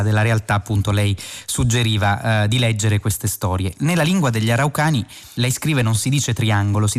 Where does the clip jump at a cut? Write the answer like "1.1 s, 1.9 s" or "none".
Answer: none